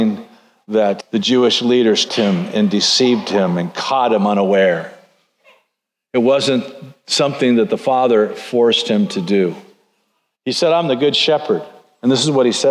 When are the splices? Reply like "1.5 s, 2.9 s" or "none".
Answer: 1.0 s, 2.1 s